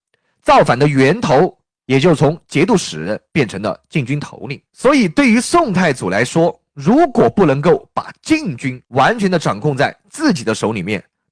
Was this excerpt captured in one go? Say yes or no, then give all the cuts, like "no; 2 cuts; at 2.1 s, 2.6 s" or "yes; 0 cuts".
no; 2 cuts; at 4.7 s, 8.8 s